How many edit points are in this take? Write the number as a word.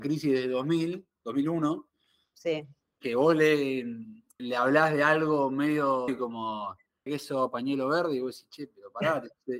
three